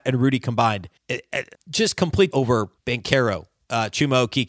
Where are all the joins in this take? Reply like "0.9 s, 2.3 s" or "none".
1.0 s, 1.5 s, 2.3 s, 2.8 s

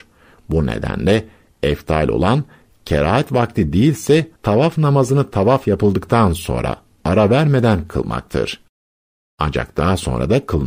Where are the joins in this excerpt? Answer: 4.4 s

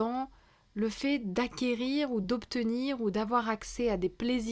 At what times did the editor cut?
none

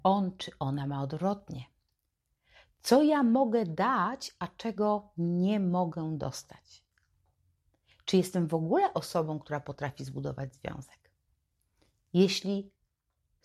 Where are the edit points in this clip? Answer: none

